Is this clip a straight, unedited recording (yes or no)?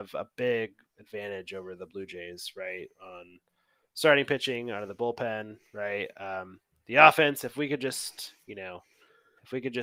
yes